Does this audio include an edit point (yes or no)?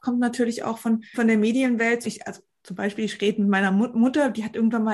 yes